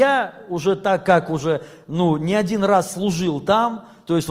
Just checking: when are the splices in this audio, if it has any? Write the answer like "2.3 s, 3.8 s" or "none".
none